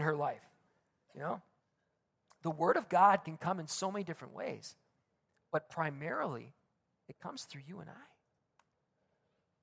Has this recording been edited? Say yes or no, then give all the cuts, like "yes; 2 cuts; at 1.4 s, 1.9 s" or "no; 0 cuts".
no; 0 cuts